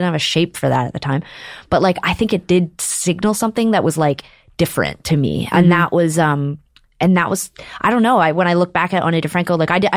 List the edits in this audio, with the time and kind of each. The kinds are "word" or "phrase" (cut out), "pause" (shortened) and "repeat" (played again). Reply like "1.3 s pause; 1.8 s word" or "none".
none